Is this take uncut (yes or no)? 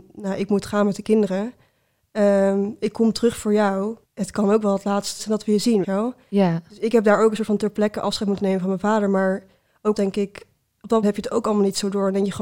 no